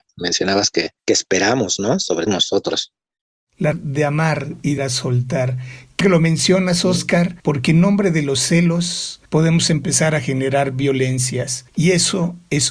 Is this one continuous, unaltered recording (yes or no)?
no